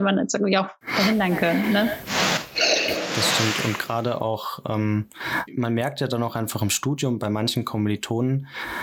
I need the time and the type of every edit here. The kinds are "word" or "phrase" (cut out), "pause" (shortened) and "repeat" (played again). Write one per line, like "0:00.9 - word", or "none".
0:05.5 - word